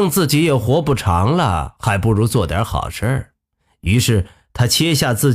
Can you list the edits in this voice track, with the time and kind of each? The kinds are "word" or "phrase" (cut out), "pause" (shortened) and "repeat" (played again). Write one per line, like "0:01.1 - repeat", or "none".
none